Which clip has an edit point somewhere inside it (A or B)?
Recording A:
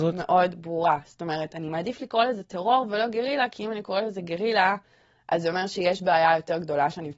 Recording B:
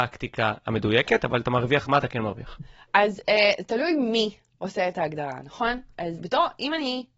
B